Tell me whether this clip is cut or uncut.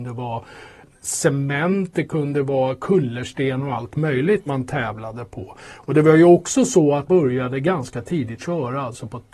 cut